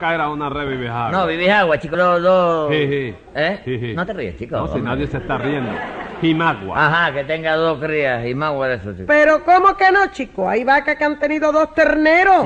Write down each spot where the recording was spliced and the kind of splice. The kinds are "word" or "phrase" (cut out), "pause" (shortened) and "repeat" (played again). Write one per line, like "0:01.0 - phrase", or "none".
0:01.9 - word